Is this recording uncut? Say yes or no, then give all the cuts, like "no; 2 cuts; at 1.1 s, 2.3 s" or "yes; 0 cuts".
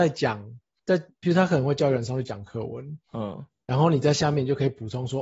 no; 1 cut; at 3.0 s